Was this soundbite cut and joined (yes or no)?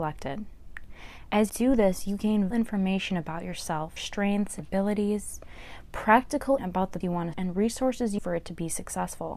yes